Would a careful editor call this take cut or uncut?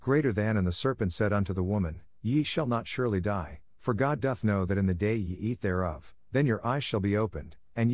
uncut